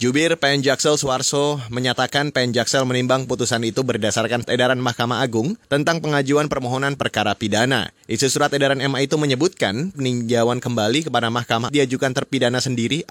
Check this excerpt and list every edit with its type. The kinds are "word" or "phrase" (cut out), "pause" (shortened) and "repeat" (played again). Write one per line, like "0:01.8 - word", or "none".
0:04.4 - word
0:05.6 - pause
0:07.0 - phrase
0:08.0 - pause
0:09.9 - word
0:11.7 - phrase